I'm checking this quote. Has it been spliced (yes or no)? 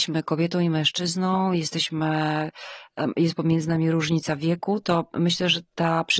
no